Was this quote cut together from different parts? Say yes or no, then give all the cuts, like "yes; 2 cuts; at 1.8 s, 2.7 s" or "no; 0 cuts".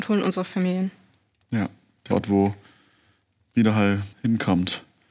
yes; 2 cuts; at 2.1 s, 4.1 s